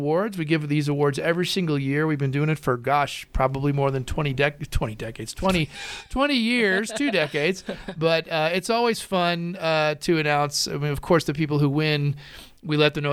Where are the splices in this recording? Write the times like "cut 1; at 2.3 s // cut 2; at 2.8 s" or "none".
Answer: none